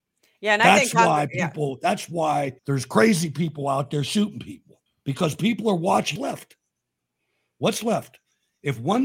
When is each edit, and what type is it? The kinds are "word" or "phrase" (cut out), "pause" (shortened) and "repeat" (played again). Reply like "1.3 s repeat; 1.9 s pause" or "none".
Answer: 2.6 s pause; 4.9 s pause; 6.2 s phrase